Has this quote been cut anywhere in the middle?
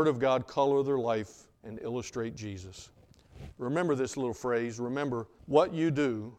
yes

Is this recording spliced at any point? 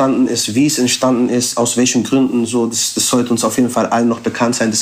no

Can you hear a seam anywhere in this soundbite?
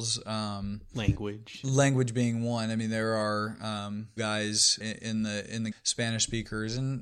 yes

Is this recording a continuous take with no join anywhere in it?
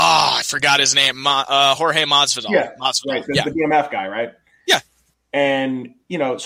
yes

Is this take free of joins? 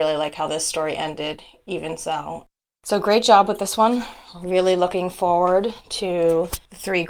yes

